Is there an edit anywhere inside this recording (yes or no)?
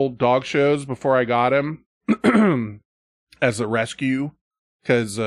no